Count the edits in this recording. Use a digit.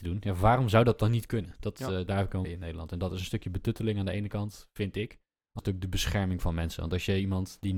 3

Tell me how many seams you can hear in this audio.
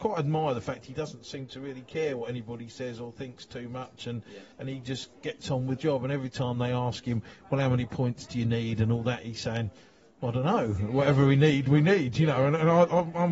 2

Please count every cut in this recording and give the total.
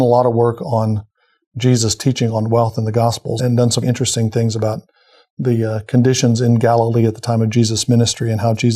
2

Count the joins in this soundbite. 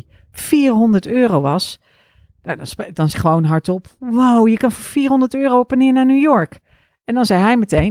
1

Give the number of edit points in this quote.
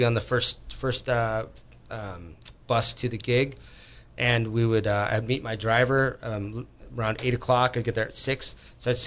0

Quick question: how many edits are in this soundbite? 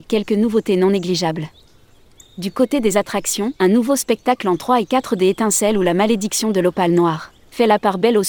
1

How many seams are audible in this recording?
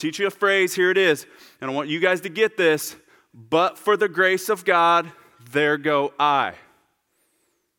0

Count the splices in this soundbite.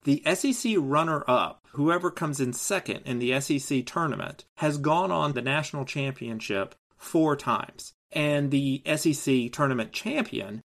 4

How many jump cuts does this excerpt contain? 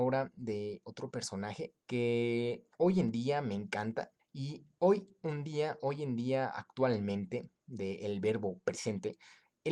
2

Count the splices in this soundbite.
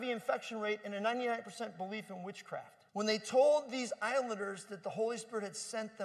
1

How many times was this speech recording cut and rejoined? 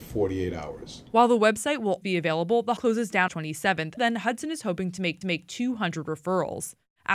5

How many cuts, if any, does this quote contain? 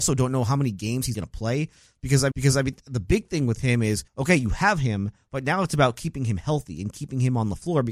3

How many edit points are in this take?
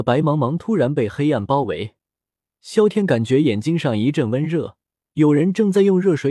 1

